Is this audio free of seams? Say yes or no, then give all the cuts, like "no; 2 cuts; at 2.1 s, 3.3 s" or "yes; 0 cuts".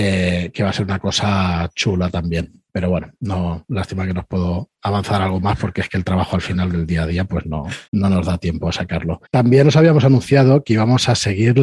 no; 3 cuts; at 2.7 s, 7.8 s, 9.2 s